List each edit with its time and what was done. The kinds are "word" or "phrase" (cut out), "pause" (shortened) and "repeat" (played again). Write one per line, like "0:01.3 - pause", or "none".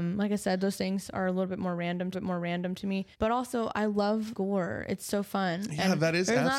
0:02.1 - repeat
0:03.1 - pause
0:04.3 - phrase